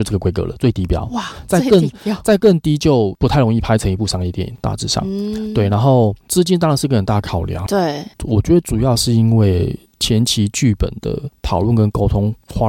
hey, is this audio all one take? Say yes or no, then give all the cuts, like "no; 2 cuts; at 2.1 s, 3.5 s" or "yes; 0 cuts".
yes; 0 cuts